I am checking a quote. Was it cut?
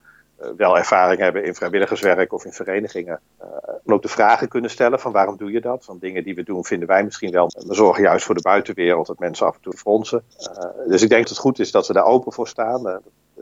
yes; 6 cuts; at 3.3 s, 3.9 s, 7.5 s, 9.7 s, 10.3 s, 11.2 s

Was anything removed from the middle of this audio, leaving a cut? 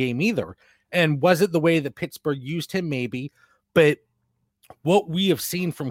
no; 0 cuts

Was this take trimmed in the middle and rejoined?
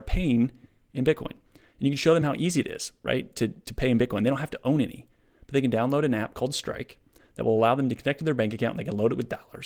no; 0 cuts

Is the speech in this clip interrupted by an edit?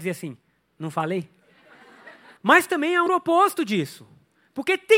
yes; 2 cuts; at 2.4 s, 3.1 s

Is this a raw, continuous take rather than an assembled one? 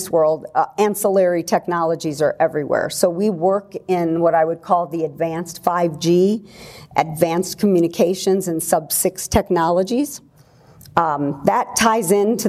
yes; 0 cuts

